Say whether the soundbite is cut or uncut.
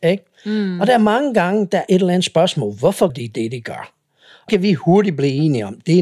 cut